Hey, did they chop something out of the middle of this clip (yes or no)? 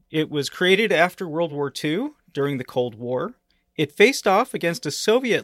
no